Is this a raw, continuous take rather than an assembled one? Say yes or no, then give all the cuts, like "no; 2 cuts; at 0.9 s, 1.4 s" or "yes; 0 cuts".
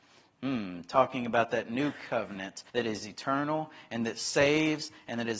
no; 1 cut; at 2.7 s